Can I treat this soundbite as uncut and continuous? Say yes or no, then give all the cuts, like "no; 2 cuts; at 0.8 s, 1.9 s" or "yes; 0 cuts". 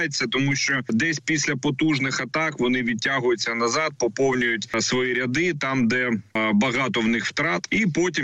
yes; 0 cuts